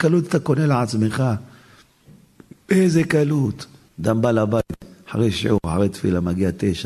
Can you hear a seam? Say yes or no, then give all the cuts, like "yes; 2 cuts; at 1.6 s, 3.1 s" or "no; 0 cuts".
no; 0 cuts